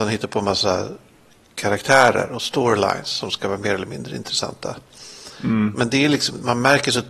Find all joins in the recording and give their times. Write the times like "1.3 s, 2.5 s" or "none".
none